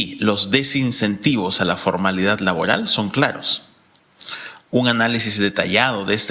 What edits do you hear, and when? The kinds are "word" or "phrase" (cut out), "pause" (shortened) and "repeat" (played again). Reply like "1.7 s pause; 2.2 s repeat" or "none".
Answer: none